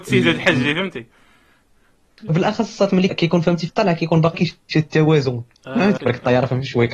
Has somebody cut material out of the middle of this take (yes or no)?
yes